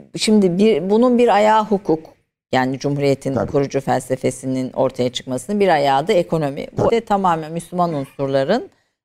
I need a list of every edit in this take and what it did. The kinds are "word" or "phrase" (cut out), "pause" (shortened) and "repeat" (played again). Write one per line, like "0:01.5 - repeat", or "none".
0:06.9 - word